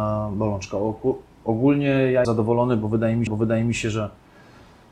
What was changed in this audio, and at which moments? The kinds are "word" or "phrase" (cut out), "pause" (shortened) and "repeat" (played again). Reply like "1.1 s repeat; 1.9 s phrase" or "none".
2.2 s word; 3.3 s repeat